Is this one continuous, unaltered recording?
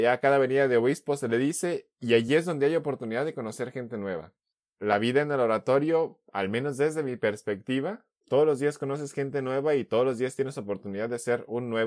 yes; 0 cuts

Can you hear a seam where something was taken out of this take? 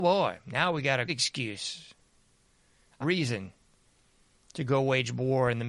yes; 2 cuts; at 1.1 s, 3.0 s

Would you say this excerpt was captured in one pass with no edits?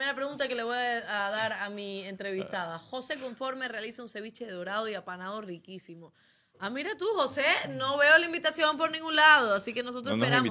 yes; 0 cuts

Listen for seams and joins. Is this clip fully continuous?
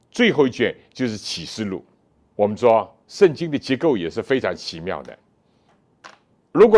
no; 2 cuts; at 2.1 s, 3.0 s

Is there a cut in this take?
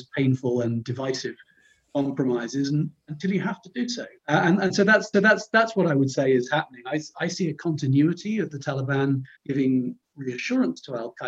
yes; 3 cuts; at 4.2 s, 5.1 s, 9.3 s

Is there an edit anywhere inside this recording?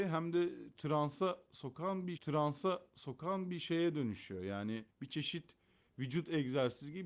yes; 2 cuts; at 2.2 s, 4.9 s

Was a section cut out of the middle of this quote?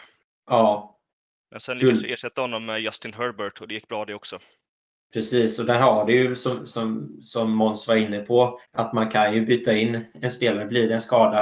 yes; 1 cut; at 8.6 s

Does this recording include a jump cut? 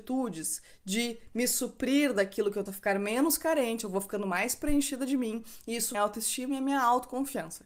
yes; 2 cuts; at 2.7 s, 5.9 s

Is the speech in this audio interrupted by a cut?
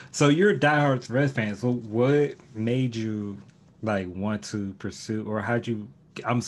no; 0 cuts

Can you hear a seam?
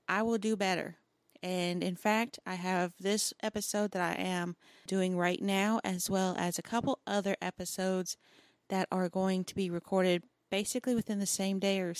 no; 0 cuts

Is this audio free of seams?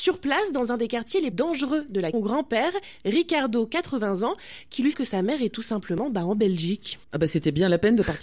no; 4 cuts; at 1.3 s, 2.1 s, 4.9 s, 7.0 s

